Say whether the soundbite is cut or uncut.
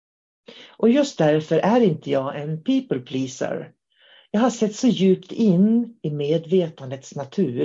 uncut